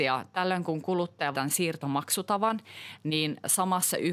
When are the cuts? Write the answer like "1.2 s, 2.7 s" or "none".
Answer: 1.3 s